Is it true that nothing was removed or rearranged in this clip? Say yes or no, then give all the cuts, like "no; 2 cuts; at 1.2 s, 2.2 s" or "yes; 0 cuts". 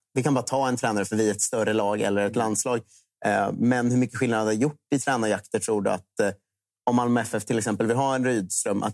yes; 0 cuts